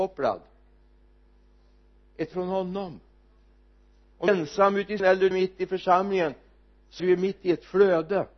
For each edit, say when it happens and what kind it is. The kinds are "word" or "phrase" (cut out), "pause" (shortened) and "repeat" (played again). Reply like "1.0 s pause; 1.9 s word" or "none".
2.3 s word; 4.3 s word; 5.0 s word; 5.3 s word; 7.0 s word